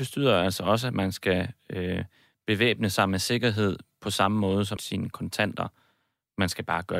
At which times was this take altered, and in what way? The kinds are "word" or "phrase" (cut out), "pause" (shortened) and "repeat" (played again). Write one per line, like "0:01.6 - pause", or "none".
0:04.8 - phrase